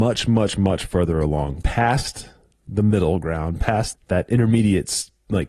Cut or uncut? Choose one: cut